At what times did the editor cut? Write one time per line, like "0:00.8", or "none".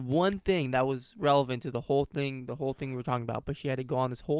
none

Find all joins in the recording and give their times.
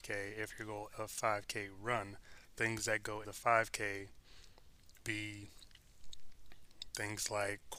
0:00.9
0:02.5
0:03.2
0:05.0

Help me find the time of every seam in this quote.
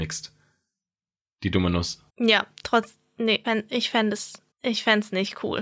0:02.1
0:03.4
0:04.5

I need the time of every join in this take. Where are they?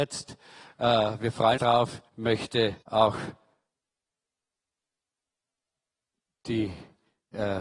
0:01.6
0:02.1
0:02.8

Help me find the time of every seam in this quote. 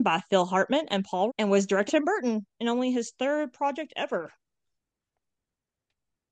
0:01.3
0:01.9

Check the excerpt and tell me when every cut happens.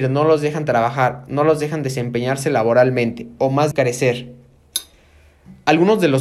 0:03.7

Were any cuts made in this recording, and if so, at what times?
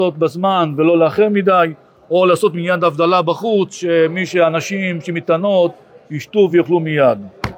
none

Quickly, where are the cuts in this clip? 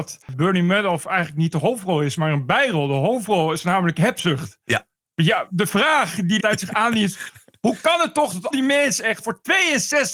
0:06.4
0:08.5
0:09.2

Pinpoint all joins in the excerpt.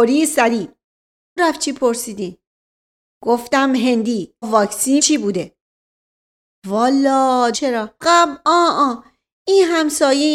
0:01.4
0:04.4
0:05.0
0:07.5
0:08.0

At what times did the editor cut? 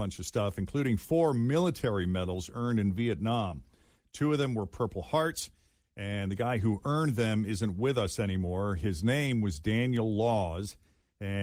none

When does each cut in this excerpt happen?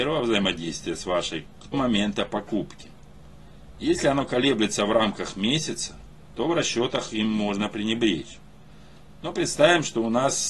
0:01.7

